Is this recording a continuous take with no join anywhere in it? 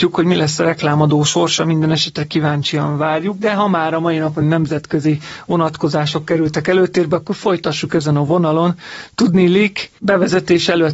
no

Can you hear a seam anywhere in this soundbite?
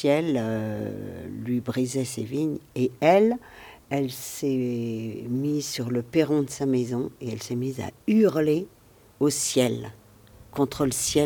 no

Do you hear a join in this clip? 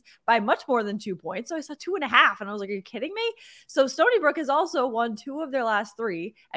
no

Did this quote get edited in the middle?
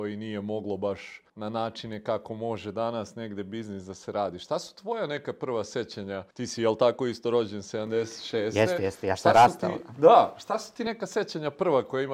yes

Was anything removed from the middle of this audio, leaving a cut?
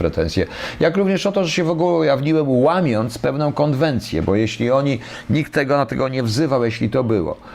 no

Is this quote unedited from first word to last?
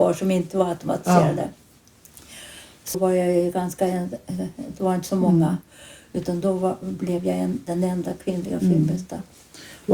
no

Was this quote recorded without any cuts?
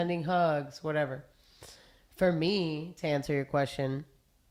yes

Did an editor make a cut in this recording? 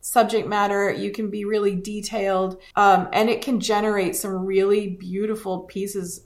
yes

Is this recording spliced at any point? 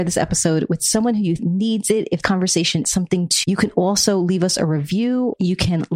yes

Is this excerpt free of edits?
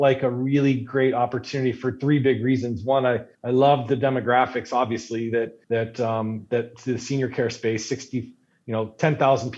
no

